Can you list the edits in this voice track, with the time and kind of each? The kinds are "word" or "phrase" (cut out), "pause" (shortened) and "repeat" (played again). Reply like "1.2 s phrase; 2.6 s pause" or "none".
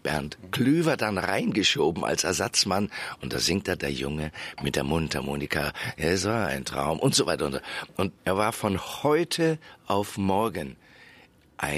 8.2 s pause